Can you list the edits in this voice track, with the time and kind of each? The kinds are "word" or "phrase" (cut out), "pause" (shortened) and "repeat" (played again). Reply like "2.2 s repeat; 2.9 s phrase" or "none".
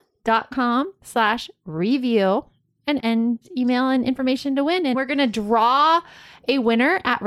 3.0 s phrase; 4.9 s word